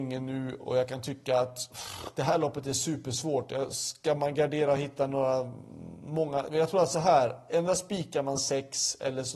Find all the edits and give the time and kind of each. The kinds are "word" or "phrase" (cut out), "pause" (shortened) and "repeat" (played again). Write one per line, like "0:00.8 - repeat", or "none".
none